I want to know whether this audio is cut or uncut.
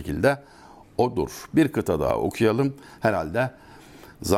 uncut